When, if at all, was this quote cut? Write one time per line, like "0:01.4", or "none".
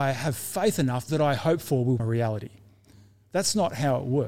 0:01.1
0:02.0